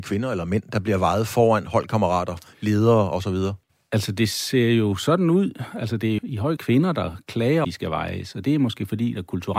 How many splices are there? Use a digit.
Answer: 4